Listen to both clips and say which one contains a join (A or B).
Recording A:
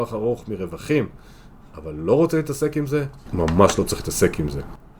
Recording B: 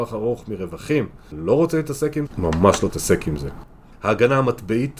B